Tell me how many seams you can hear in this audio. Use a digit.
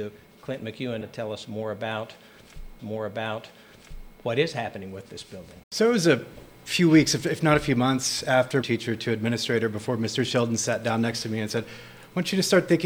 4